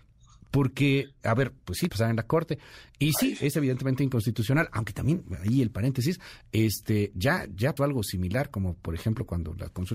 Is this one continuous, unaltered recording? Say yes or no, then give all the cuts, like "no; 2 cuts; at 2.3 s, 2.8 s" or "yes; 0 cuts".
no; 3 cuts; at 1.2 s, 1.9 s, 7.8 s